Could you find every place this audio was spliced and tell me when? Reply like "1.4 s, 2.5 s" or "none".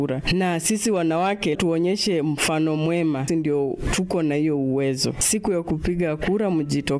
1.5 s, 3.3 s